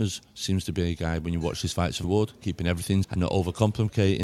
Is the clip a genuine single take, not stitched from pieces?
no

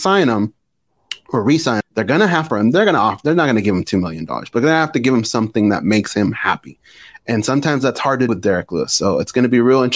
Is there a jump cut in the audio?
yes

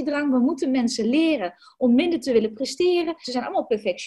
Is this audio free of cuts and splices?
yes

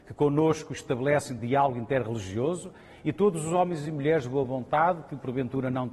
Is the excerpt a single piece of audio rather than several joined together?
yes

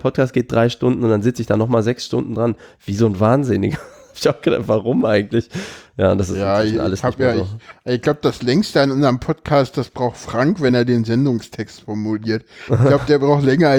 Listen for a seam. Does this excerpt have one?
no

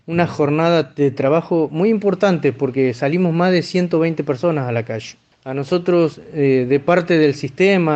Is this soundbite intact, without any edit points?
yes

